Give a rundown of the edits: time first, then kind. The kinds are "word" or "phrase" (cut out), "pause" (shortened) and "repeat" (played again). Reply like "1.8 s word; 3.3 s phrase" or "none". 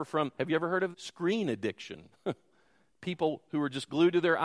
0.9 s word; 2.1 s pause